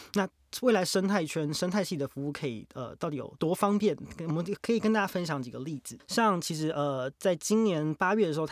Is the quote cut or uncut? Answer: uncut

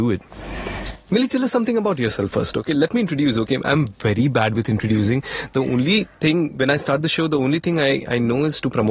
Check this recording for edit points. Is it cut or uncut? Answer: uncut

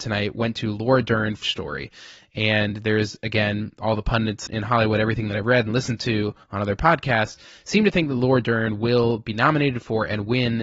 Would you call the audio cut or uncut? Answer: cut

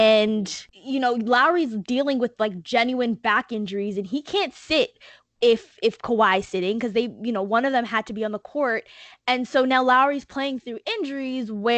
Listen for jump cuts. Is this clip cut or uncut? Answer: uncut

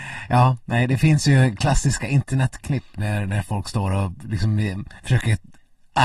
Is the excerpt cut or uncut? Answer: cut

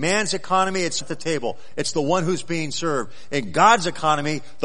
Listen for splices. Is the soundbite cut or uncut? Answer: cut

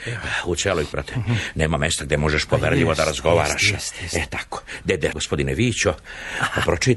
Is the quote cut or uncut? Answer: cut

